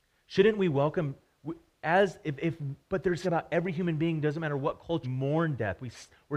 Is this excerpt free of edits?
no; 2 cuts; at 3.2 s, 5.0 s

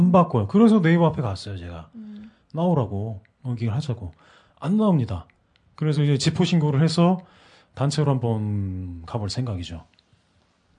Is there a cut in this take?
no; 0 cuts

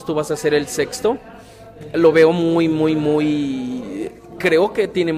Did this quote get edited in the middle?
no; 0 cuts

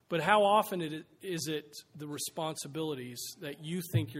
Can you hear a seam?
no; 0 cuts

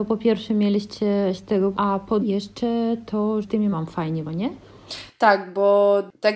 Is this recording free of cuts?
no; 6 cuts; at 1.4 s, 1.7 s, 2.2 s, 3.4 s, 3.7 s, 4.2 s

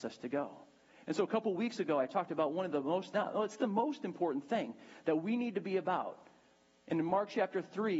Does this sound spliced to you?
no; 0 cuts

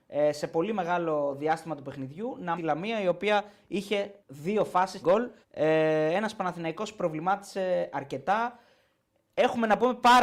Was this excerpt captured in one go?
no; 4 cuts; at 2.6 s, 4.2 s, 5.0 s, 5.4 s

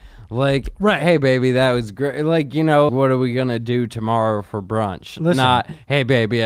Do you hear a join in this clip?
yes; 1 cut; at 2.9 s

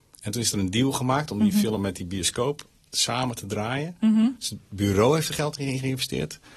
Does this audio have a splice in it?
no; 0 cuts

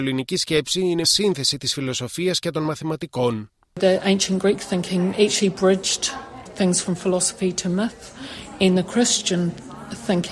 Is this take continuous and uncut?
no; 3 cuts; at 1.0 s, 6.5 s, 8.8 s

